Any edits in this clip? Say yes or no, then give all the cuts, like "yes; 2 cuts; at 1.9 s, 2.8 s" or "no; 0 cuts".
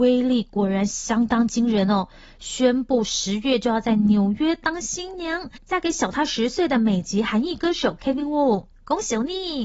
no; 0 cuts